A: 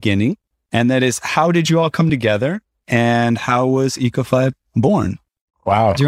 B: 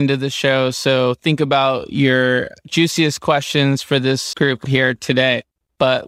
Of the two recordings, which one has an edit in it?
B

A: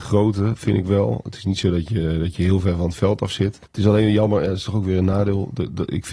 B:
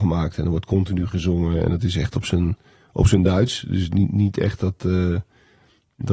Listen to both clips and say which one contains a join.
A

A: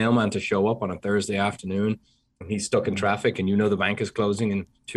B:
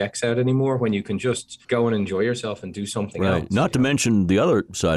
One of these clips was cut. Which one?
B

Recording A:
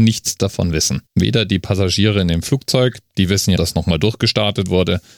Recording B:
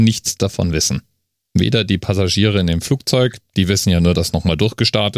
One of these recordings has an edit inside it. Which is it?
A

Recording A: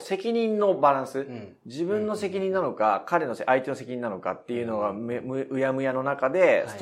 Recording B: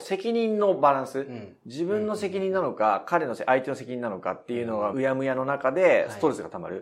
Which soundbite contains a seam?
B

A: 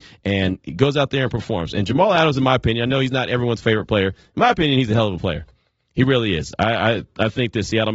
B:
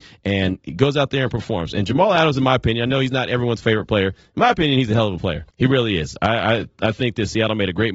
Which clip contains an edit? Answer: B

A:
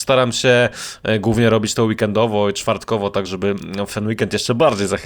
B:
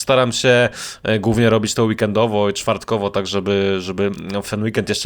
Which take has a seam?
A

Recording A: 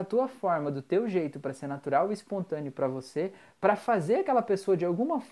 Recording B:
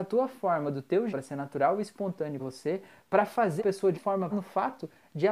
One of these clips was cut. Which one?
B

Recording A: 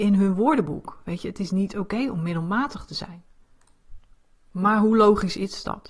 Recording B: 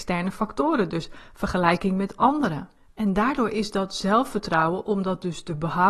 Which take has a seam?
B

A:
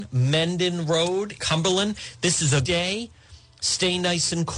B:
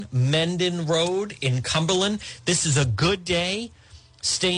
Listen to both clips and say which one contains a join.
A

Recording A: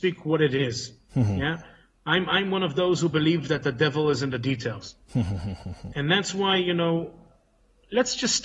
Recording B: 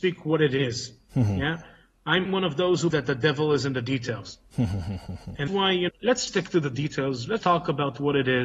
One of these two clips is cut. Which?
B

